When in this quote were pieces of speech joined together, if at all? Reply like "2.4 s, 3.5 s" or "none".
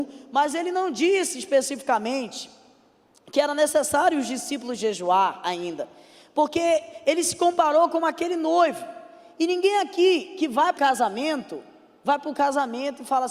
10.8 s